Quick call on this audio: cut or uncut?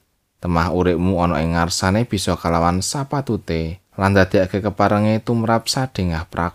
cut